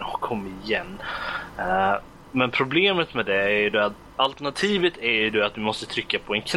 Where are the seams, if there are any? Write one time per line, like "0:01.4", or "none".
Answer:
none